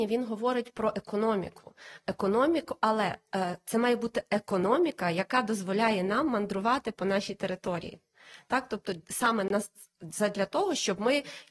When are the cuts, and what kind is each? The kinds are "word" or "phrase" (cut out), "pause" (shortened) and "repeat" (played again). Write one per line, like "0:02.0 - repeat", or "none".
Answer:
none

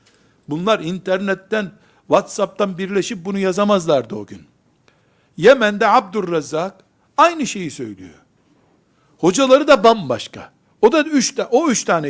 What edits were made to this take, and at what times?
none

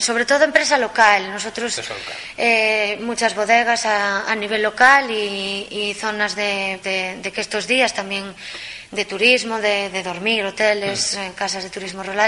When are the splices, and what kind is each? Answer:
0:06.8 - word

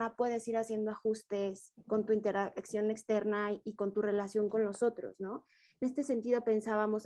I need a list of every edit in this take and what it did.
0:01.8 - pause
0:05.8 - word

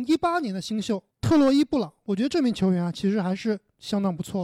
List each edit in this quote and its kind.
0:01.1 - pause

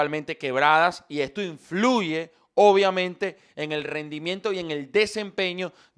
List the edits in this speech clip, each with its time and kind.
none

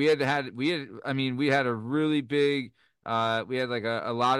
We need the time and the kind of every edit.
none

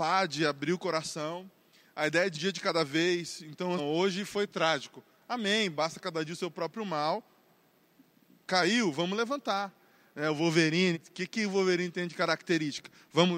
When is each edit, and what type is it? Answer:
0:02.3 - word
0:03.8 - word
0:10.9 - word

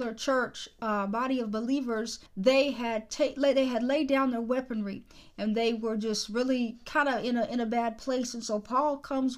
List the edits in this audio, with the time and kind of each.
0:02.3 - pause

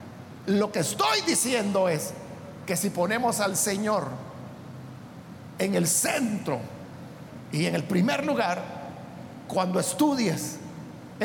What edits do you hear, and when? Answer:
none

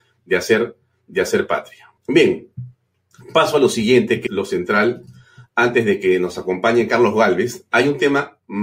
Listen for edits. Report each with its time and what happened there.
0:02.0 - pause
0:04.3 - word

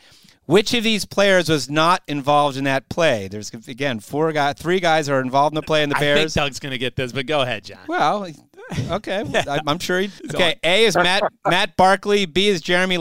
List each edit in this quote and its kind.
0:10.2 - pause

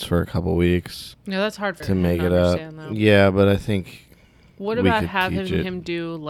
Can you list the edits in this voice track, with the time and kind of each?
0:01.8 - word

